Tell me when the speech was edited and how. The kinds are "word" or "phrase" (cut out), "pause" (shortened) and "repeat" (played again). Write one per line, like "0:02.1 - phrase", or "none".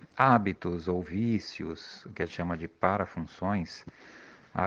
0:02.3 - word